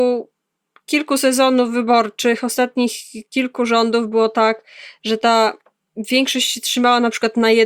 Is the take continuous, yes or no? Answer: yes